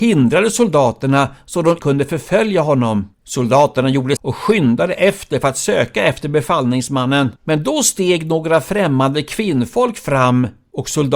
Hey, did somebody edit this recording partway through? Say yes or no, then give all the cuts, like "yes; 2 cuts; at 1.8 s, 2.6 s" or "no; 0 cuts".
yes; 4 cuts; at 1.8 s, 3.1 s, 4.2 s, 7.4 s